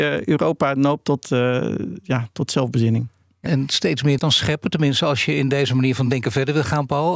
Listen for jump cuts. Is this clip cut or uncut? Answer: cut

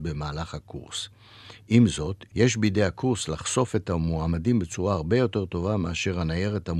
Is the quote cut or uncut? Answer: uncut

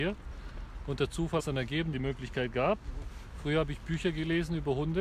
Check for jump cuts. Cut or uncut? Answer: cut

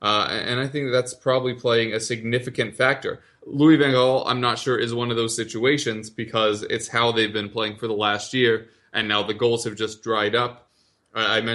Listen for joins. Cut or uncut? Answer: uncut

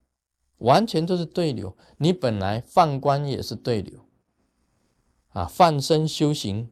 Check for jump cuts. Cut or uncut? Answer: uncut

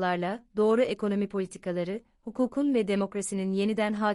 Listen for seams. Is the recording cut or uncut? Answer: uncut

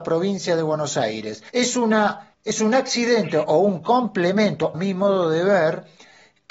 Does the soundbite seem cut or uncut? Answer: cut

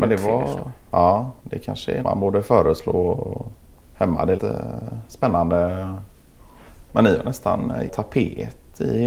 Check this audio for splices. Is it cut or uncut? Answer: cut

